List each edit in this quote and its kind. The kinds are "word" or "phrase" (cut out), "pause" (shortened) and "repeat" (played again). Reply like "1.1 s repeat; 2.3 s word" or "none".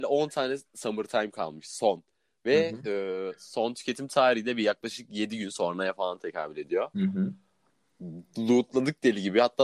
none